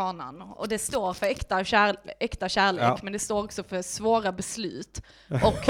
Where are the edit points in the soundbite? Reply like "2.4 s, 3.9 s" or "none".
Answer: none